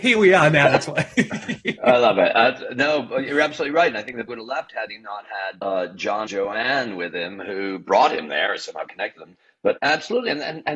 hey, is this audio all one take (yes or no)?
no